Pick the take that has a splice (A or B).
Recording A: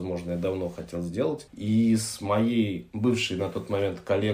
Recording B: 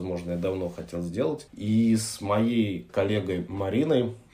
B